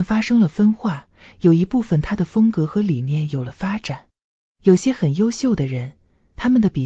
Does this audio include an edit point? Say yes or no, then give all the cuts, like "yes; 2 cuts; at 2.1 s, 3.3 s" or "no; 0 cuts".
no; 0 cuts